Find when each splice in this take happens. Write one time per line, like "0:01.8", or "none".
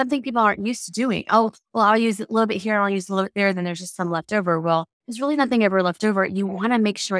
0:04.9

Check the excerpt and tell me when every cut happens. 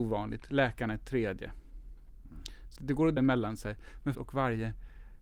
0:02.8
0:03.2
0:04.1

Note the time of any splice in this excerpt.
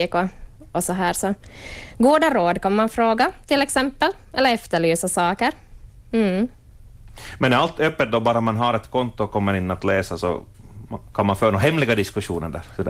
none

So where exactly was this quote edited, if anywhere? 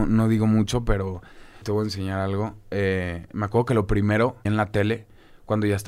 0:01.6
0:04.4

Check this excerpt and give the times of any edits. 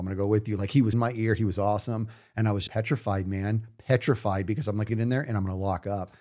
0:00.9
0:02.7
0:04.9

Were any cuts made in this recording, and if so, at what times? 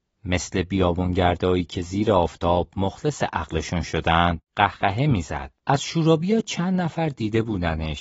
0:04.4
0:05.6

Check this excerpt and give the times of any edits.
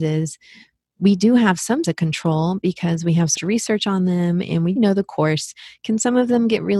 0:01.8
0:03.4
0:04.8

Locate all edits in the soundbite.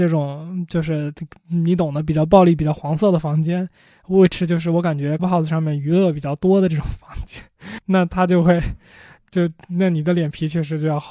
0:05.2

